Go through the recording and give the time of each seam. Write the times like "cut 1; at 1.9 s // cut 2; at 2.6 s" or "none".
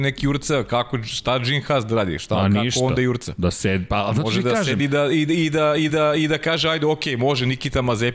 cut 1; at 5.9 s